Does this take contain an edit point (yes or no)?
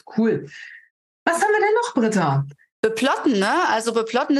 no